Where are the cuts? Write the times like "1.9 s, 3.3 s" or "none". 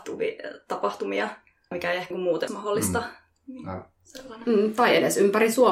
1.7 s, 2.1 s, 2.5 s